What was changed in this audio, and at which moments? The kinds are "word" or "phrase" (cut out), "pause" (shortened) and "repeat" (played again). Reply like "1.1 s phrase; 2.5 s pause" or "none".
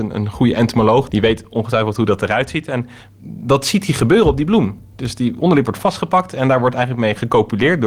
1.1 s word; 4.9 s pause